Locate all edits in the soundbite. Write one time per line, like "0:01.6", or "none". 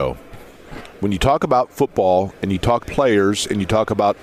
0:00.9
0:02.8